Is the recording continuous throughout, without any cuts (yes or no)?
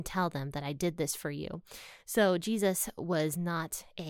yes